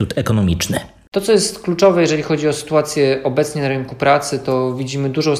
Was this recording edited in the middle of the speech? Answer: no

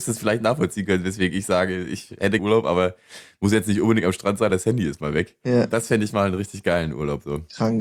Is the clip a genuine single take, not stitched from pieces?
no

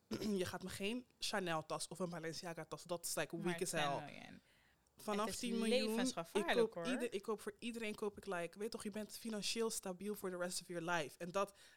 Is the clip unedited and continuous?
yes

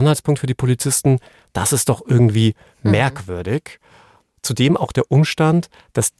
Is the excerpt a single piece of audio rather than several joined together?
yes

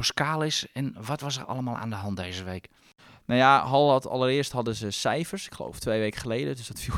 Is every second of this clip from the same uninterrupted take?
yes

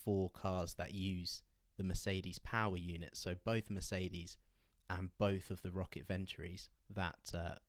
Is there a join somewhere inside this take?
no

